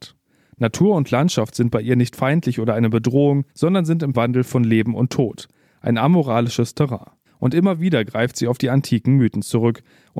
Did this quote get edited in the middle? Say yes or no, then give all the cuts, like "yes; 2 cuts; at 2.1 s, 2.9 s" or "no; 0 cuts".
yes; 3 cuts; at 3.5 s, 4.1 s, 7.3 s